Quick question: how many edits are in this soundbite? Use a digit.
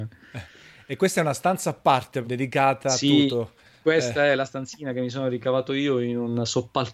1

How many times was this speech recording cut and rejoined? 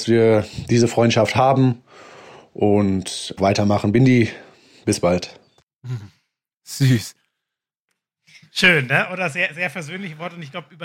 1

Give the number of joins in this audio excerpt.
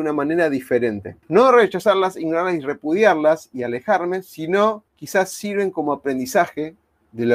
2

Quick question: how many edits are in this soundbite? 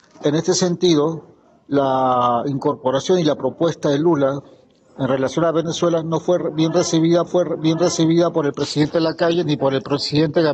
1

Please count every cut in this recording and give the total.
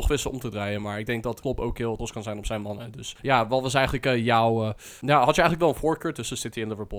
1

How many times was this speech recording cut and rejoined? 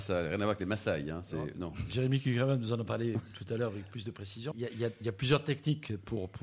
1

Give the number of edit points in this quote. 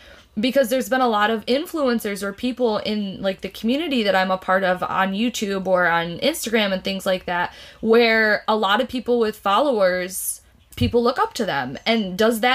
1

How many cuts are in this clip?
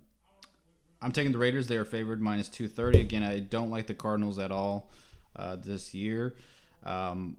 0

